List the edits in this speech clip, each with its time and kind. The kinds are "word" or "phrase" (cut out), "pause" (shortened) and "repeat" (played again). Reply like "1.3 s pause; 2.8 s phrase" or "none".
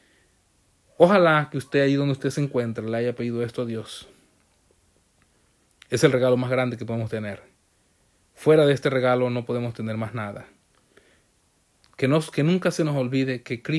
none